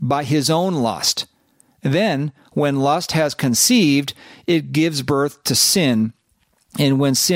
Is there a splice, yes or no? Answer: no